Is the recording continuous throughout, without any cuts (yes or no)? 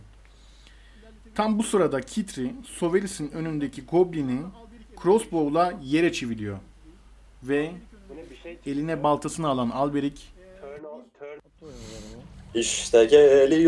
yes